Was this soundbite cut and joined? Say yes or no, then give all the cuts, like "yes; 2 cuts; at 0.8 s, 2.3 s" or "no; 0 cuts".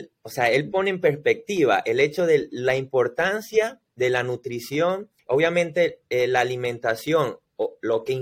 yes; 1 cut; at 5.2 s